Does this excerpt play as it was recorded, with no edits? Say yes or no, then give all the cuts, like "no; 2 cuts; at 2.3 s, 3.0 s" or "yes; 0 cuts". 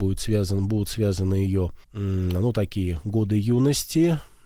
no; 1 cut; at 1.8 s